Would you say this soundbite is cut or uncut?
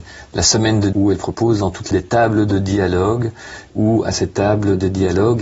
cut